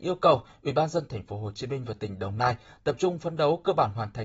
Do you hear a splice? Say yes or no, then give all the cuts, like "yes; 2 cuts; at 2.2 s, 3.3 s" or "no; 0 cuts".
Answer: no; 0 cuts